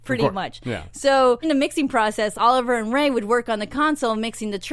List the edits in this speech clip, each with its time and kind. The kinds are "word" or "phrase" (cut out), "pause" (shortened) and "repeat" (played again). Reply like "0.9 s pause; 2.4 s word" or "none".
1.4 s word; 2.3 s word